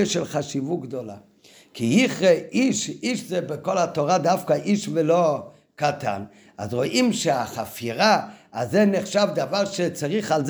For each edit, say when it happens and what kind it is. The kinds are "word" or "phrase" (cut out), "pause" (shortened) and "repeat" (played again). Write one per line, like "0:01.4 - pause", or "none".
none